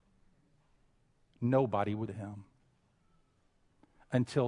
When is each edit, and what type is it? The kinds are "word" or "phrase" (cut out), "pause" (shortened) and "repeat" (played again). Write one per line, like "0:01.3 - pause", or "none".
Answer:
0:02.1 - word